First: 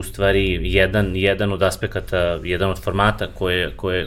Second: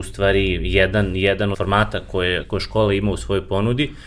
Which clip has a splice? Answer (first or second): second